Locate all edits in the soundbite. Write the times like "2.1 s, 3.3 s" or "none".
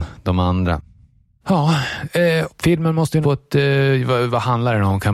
2.5 s, 3.2 s